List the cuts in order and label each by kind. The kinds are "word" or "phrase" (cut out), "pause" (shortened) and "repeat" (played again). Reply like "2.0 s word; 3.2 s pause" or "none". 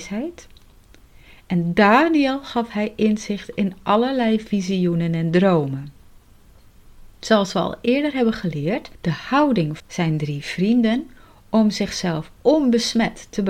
7.1 s pause; 8.9 s pause; 9.8 s phrase